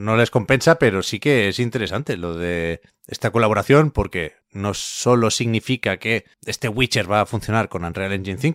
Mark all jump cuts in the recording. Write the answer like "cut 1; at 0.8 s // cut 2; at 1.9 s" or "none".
cut 1; at 4.4 s // cut 2; at 6.3 s

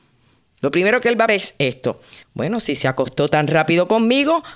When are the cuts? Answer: cut 1; at 1.3 s // cut 2; at 2.2 s

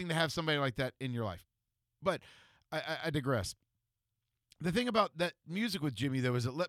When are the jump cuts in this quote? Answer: none

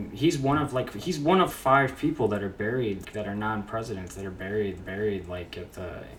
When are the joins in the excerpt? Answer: cut 1; at 1.5 s // cut 2; at 3.0 s // cut 3; at 4.8 s

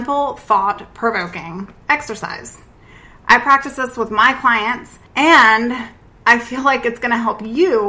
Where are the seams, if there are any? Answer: none

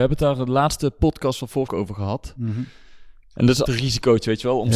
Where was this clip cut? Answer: cut 1; at 1.7 s // cut 2; at 3.6 s

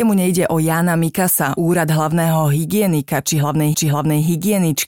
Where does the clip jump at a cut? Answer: cut 1; at 1.6 s // cut 2; at 3.7 s

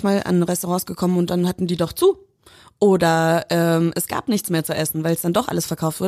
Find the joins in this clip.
none

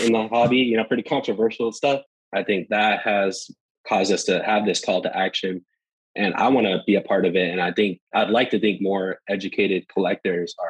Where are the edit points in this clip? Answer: cut 1; at 2.1 s // cut 2; at 8.1 s

